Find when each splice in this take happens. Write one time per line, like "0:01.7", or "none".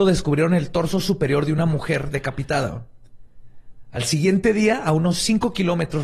none